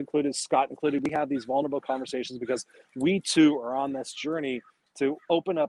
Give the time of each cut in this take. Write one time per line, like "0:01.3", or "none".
none